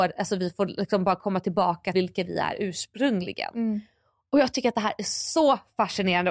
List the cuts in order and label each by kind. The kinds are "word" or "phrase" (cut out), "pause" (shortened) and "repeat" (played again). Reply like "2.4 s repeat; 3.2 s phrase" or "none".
1.9 s word